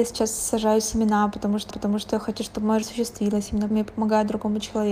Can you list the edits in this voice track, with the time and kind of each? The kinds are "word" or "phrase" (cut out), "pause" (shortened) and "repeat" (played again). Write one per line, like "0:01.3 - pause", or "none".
0:01.7 - repeat
0:02.8 - word
0:03.7 - word